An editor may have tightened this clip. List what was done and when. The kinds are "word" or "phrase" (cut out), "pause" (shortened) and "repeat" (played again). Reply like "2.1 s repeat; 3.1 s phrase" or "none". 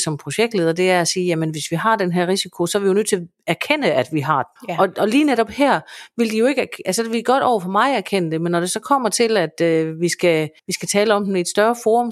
4.6 s pause; 10.6 s pause